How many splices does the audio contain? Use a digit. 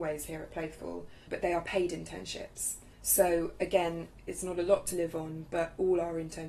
0